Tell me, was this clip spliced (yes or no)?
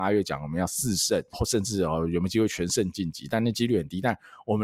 yes